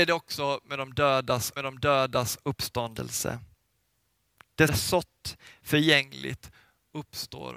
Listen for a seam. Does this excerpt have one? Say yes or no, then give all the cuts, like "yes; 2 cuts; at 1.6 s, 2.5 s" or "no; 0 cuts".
yes; 2 cuts; at 1.6 s, 4.7 s